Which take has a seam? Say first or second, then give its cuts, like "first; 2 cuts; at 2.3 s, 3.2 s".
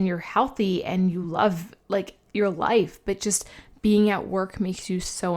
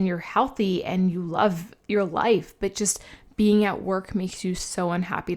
second; 1 cut; at 1.8 s